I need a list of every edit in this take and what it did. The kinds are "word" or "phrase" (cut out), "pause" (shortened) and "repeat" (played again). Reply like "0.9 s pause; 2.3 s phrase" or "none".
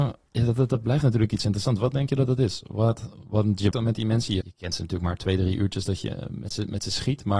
3.7 s word; 4.4 s word